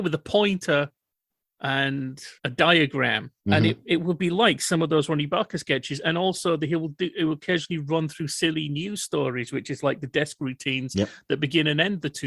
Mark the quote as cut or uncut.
cut